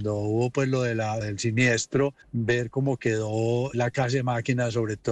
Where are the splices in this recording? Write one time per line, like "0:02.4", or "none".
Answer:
0:01.2
0:02.2
0:03.7